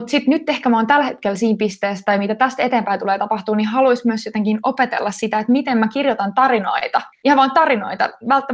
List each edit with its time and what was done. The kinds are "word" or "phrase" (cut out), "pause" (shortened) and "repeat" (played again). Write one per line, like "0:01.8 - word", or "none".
0:07.1 - pause